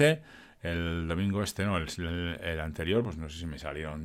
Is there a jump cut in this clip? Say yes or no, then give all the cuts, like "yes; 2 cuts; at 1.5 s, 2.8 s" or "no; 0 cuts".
no; 0 cuts